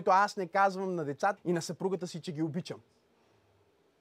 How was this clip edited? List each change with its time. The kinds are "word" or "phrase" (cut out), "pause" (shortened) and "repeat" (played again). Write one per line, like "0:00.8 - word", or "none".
0:01.4 - word